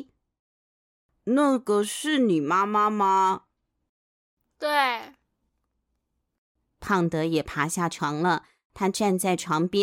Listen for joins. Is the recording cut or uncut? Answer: uncut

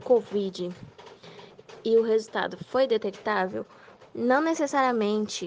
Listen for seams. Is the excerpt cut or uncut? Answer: uncut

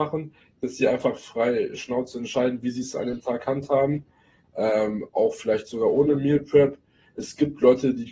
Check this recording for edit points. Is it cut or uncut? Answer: uncut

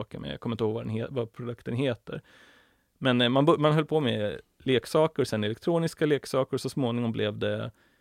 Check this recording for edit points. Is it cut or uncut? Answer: uncut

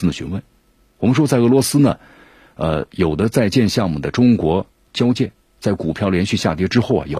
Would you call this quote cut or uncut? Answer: uncut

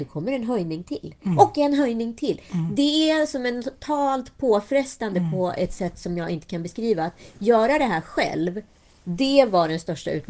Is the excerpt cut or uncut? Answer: uncut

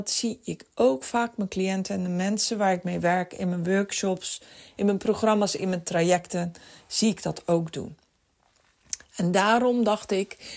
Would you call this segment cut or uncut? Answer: uncut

